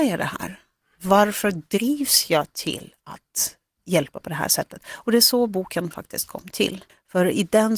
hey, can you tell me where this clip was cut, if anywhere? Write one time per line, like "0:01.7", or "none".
none